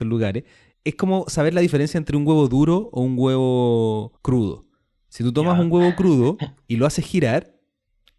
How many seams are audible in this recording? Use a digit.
1